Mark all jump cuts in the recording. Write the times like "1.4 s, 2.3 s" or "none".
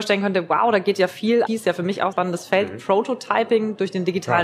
1.5 s, 2.1 s